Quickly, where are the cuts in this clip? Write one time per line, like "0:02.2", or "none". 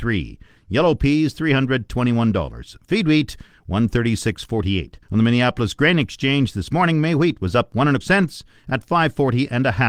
0:05.0
0:08.0